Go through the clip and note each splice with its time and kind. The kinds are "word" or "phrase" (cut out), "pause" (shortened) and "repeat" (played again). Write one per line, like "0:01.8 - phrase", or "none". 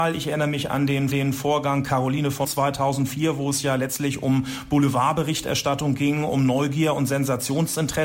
0:01.1 - repeat
0:02.4 - word